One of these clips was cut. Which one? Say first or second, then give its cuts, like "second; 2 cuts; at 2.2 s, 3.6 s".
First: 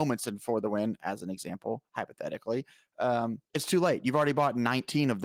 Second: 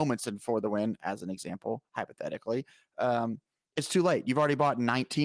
first; 1 cut; at 3.5 s